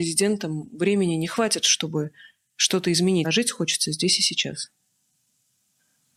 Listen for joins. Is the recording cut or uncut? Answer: cut